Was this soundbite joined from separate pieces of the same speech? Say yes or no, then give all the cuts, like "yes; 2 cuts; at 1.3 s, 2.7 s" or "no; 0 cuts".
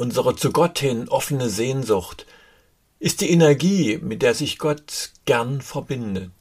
no; 0 cuts